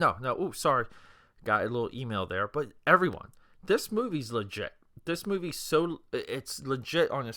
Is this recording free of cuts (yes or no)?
yes